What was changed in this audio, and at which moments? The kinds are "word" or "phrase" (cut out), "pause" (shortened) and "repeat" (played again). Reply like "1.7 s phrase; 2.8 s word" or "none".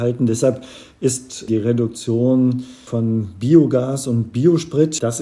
none